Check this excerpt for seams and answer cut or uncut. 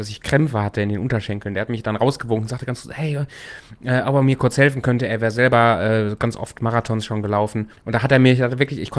cut